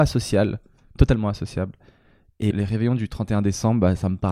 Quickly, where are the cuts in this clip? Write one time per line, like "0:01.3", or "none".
0:02.5